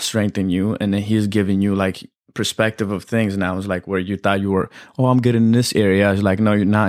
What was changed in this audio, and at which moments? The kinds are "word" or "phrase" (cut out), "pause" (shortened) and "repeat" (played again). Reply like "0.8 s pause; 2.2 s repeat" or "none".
none